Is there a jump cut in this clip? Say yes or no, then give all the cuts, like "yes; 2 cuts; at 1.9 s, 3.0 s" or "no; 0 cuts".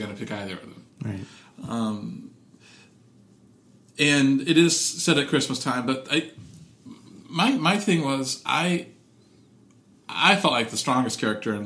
no; 0 cuts